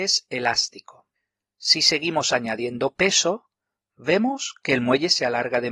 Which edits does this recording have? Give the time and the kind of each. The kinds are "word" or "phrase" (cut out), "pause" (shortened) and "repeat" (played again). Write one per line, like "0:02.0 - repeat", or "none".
none